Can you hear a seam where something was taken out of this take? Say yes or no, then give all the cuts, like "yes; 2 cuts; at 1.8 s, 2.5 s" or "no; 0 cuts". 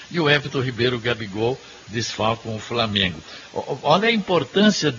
no; 0 cuts